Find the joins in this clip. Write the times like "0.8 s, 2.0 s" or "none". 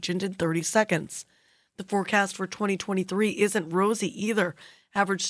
none